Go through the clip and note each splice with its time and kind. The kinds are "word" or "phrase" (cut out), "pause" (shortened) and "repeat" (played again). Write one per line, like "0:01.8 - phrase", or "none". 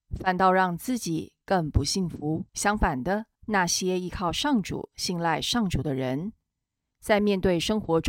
0:02.5 - pause
0:03.3 - pause